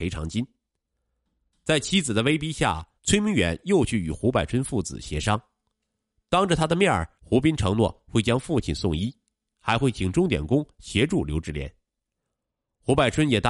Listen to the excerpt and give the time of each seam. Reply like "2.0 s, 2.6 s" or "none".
3.0 s, 7.2 s